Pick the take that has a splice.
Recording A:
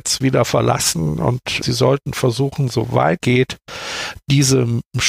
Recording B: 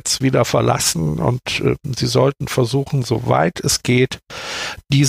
A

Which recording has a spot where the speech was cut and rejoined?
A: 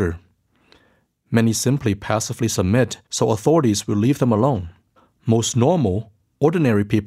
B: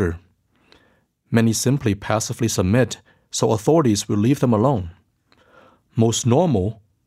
A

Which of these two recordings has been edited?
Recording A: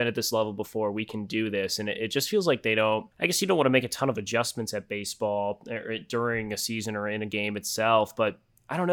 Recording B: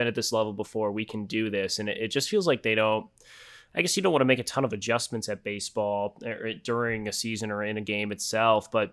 A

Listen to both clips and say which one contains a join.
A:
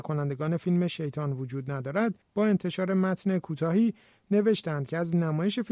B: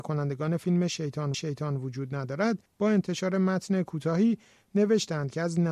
B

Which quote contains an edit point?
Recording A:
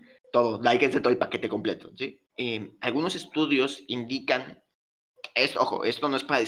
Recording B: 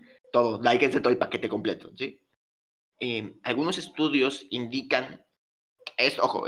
A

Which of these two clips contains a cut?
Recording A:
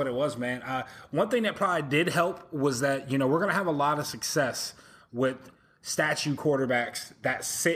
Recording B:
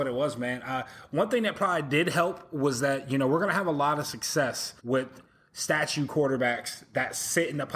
B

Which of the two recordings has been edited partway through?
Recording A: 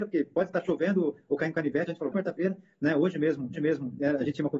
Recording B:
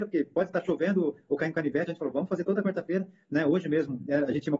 A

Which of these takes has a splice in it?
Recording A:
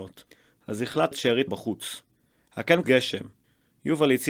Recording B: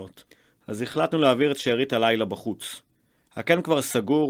A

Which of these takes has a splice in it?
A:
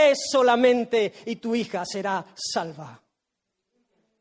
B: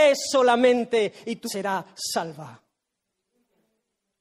B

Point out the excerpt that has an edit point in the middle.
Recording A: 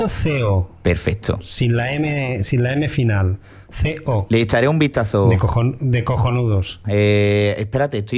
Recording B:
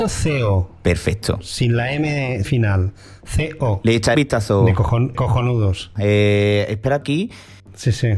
B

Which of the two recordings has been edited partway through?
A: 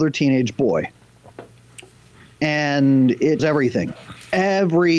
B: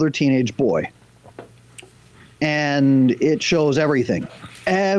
A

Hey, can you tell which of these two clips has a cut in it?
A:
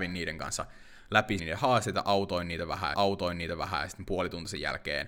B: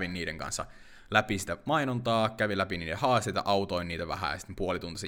A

